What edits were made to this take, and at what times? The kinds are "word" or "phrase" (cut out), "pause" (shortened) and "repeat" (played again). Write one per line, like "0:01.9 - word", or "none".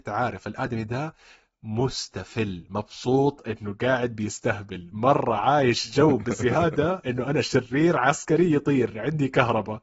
none